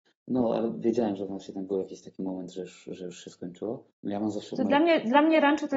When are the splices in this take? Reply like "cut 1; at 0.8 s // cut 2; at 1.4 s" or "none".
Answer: cut 1; at 3.9 s